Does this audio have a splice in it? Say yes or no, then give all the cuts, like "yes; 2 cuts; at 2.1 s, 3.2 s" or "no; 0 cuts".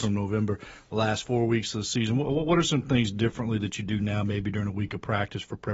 no; 0 cuts